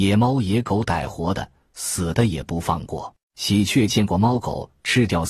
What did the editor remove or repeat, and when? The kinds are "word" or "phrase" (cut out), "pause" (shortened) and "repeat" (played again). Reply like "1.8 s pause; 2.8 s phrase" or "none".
3.2 s pause